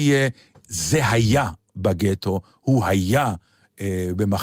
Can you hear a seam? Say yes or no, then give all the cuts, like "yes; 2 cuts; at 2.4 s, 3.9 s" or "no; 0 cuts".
no; 0 cuts